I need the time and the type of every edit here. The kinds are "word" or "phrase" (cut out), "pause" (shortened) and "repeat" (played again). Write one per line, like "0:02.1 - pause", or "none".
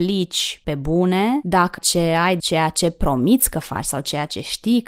0:01.8 - phrase
0:02.4 - word